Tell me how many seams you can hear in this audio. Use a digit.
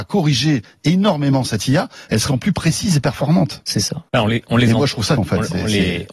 3